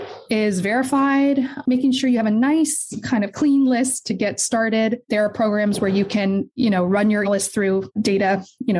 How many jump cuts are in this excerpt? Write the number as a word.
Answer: one